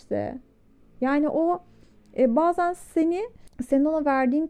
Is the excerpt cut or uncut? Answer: uncut